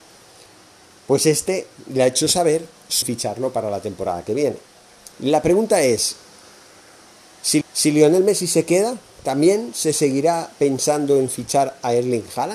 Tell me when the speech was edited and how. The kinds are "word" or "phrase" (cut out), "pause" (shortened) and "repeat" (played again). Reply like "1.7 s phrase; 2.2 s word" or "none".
3.0 s phrase; 5.1 s pause; 7.6 s repeat